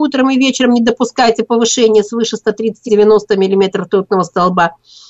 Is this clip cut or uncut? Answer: cut